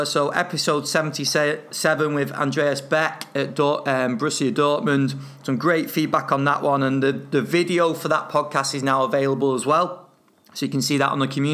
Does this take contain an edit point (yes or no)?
yes